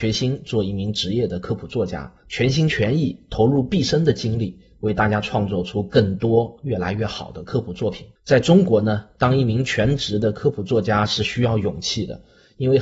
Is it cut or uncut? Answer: cut